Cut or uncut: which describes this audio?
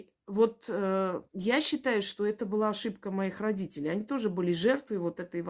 cut